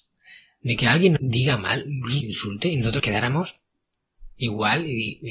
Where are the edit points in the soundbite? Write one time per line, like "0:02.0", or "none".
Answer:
0:01.2
0:02.2
0:03.0